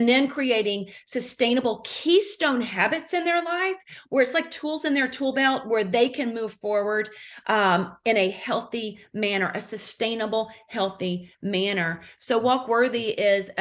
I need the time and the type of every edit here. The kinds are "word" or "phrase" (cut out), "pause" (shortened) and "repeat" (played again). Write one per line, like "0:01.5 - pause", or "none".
none